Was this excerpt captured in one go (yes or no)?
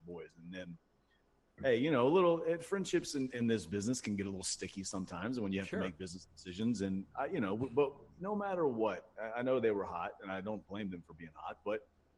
yes